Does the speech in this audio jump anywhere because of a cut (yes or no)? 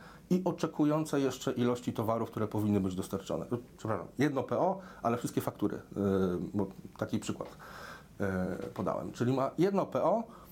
no